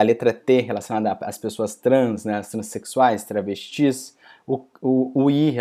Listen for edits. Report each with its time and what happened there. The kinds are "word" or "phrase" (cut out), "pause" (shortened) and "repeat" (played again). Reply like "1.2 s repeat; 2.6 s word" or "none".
none